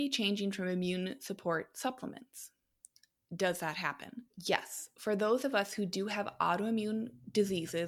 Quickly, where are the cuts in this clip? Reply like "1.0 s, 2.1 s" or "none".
4.3 s